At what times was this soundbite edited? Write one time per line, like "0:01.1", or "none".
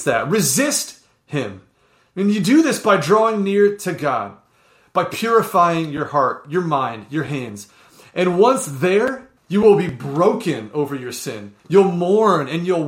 0:09.4
0:11.6

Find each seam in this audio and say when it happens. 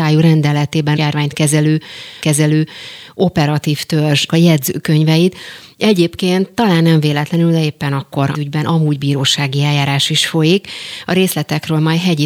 0:01.0
0:02.2
0:04.3
0:08.3

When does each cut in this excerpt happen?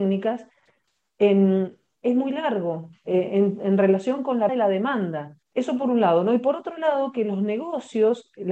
0:04.5
0:05.4

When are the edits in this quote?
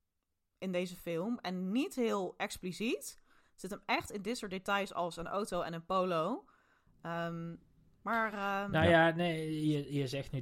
none

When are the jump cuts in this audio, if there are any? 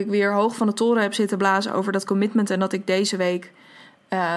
none

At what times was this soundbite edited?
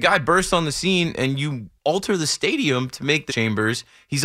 0:01.8
0:03.3

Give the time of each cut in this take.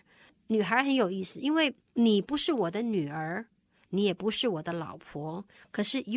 none

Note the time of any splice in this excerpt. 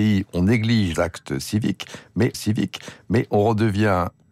0:00.9
0:02.3

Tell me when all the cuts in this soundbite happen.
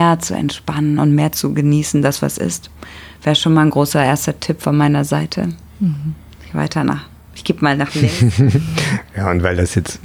none

